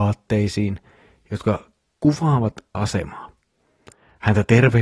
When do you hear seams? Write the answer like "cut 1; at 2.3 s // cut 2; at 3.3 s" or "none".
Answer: cut 1; at 2.7 s

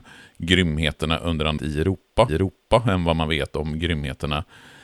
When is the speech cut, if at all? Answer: cut 1; at 1.6 s // cut 2; at 2.3 s

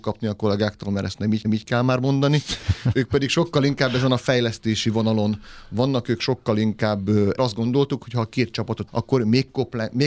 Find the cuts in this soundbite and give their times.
cut 1; at 1.4 s // cut 2; at 7.4 s // cut 3; at 8.9 s

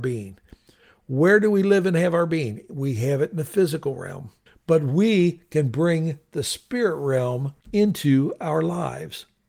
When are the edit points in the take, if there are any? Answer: cut 1; at 4.5 s // cut 2; at 7.6 s

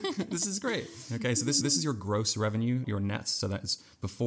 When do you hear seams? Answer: cut 1; at 1.6 s // cut 2; at 2.8 s

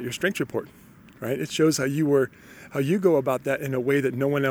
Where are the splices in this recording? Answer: none

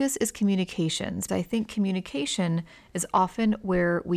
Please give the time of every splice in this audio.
cut 1; at 1.3 s

